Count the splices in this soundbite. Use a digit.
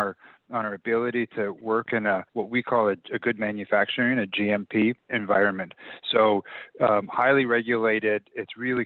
2